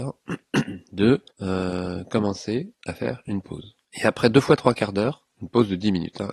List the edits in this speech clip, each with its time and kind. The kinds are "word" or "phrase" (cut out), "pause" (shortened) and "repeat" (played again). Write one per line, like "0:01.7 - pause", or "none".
0:01.3 - pause
0:02.7 - pause
0:03.8 - pause